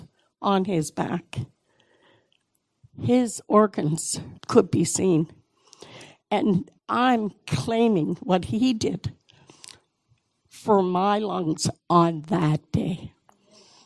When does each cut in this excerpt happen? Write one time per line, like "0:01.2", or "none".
0:04.4
0:06.8